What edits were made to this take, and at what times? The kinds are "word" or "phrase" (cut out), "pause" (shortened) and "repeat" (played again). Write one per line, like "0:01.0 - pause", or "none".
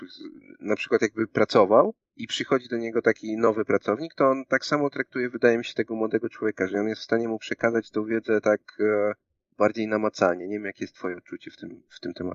0:02.0 - pause